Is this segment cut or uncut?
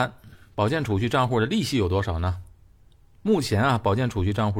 uncut